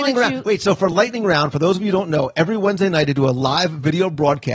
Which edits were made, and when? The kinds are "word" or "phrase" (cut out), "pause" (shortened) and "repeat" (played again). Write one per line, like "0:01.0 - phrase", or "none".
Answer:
none